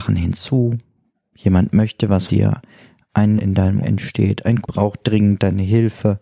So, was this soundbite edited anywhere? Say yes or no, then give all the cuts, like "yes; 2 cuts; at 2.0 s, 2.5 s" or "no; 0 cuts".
yes; 4 cuts; at 2.3 s, 3.4 s, 3.8 s, 4.6 s